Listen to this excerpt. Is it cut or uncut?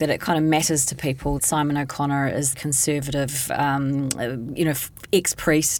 cut